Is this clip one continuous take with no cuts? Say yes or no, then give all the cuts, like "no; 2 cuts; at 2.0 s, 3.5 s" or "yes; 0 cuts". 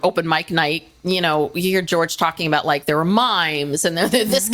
yes; 0 cuts